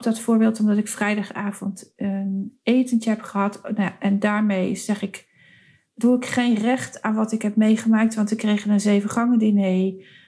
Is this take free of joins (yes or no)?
yes